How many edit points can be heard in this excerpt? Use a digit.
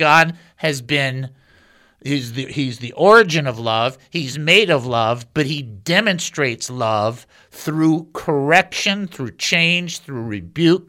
0